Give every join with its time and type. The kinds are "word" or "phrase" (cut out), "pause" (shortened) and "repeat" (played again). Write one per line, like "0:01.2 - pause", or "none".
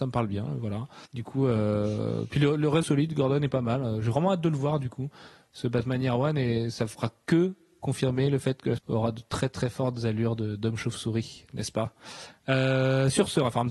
0:01.1 - pause
0:02.8 - phrase
0:08.8 - phrase